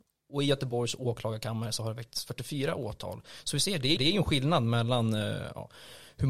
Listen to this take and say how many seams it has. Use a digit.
1